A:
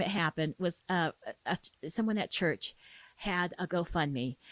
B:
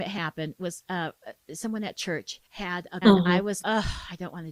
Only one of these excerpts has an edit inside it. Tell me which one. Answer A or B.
B